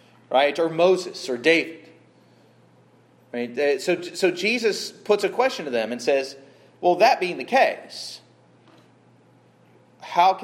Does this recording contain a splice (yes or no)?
no